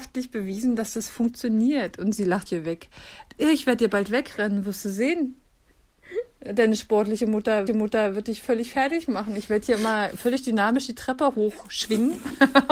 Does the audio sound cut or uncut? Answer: cut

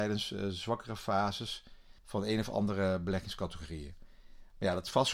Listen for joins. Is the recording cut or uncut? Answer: cut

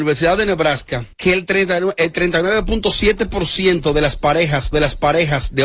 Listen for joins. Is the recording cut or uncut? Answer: cut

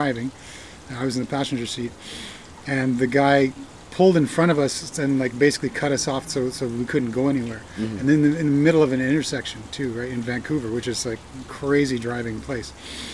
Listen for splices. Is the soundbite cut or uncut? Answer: uncut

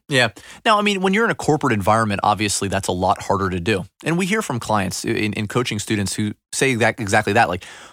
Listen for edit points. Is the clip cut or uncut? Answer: uncut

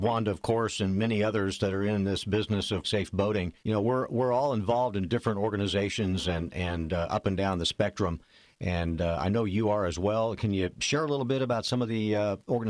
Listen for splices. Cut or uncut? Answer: cut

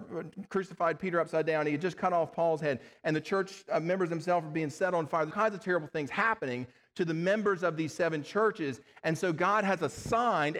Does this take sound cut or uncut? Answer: cut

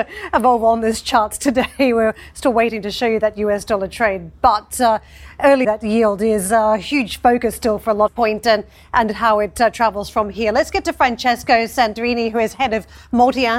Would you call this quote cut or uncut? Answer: cut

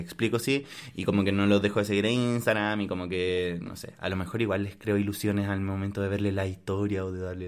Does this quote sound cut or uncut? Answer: uncut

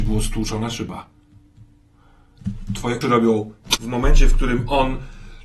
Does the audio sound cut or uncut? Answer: cut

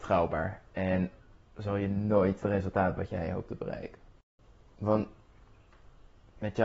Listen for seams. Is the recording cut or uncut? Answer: cut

